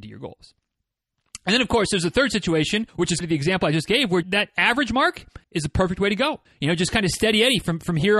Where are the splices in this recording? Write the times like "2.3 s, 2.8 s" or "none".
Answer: 2.9 s, 3.2 s, 4.2 s, 5.4 s, 6.4 s